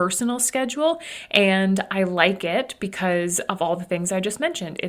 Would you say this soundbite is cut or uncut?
uncut